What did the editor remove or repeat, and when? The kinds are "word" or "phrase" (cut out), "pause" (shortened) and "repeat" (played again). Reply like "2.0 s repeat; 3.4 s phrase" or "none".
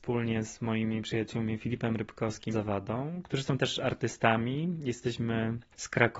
2.5 s phrase